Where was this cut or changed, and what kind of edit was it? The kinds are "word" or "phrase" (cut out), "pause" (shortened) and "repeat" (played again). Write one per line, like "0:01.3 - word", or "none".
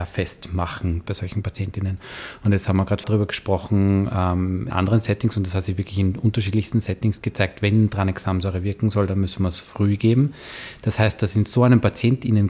0:01.0 - word
0:03.0 - word
0:04.7 - word